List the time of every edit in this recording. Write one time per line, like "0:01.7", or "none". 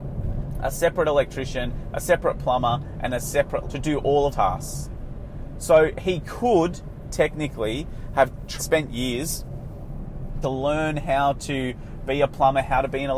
0:03.6
0:04.3
0:08.6
0:10.4